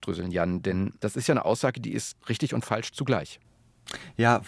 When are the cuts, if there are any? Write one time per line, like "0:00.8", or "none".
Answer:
0:02.2